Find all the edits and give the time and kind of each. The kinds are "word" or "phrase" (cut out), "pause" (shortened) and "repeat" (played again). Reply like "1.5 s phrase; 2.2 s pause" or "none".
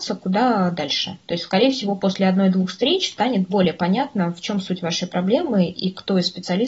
none